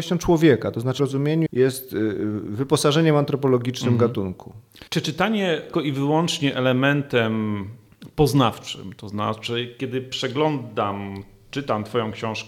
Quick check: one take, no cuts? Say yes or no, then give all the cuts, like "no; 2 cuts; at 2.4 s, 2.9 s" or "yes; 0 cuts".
no; 4 cuts; at 1.0 s, 1.5 s, 4.9 s, 5.7 s